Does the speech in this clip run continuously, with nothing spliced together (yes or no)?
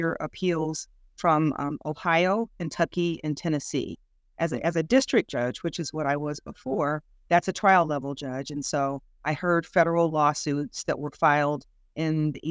yes